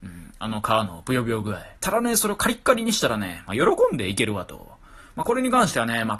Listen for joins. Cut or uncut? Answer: cut